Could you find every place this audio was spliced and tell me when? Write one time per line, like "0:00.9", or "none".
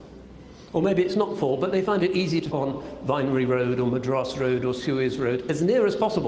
0:02.5